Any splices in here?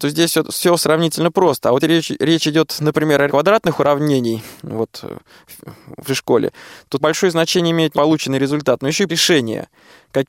yes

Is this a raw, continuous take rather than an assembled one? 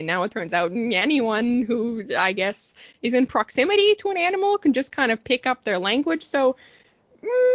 yes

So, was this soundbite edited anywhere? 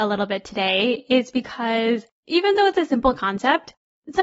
yes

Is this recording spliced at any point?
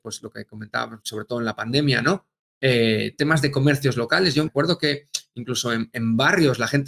yes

